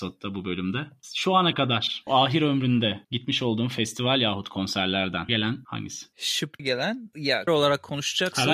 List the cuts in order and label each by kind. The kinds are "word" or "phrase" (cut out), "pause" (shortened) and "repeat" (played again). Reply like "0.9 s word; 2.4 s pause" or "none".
2.1 s word; 3.0 s pause; 5.3 s phrase; 6.6 s phrase; 7.5 s word